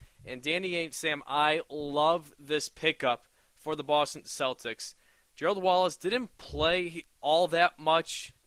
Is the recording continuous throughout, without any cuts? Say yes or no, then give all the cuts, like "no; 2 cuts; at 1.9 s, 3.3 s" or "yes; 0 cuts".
yes; 0 cuts